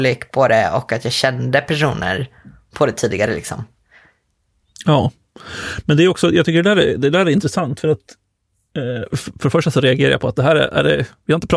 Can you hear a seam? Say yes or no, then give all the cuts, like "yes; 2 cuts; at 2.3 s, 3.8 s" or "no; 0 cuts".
no; 0 cuts